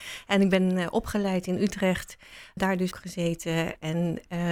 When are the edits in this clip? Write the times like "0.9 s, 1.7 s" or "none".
2.6 s, 2.9 s